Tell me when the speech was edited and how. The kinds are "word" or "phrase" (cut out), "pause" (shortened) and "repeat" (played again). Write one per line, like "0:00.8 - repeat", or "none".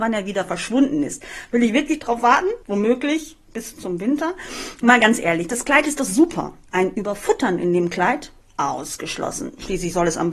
0:02.6 - pause